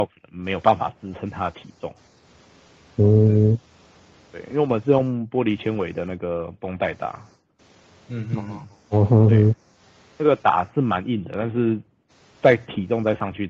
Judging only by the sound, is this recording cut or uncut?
uncut